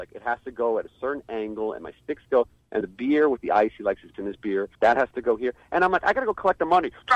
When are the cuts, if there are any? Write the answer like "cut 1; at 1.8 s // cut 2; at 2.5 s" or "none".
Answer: cut 1; at 2.8 s // cut 2; at 4.1 s // cut 3; at 4.7 s